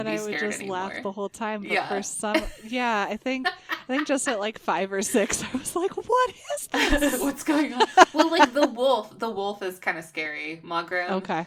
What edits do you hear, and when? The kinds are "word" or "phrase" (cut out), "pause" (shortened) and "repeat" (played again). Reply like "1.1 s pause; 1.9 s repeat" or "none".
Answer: none